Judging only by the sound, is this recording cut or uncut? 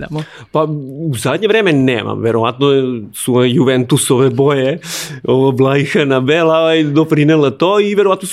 uncut